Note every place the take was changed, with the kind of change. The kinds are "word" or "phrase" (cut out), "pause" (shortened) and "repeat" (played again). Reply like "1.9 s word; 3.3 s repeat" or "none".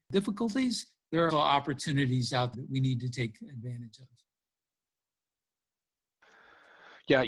1.3 s word; 2.5 s word